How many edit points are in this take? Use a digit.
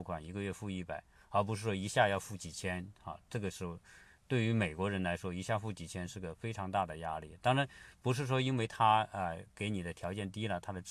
0